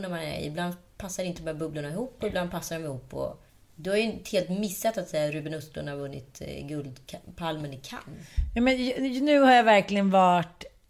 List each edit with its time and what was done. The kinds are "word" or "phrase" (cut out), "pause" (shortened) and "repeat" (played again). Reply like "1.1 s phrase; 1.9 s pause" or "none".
3.5 s pause